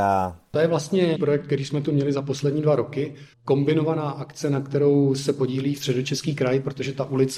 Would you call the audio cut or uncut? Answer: cut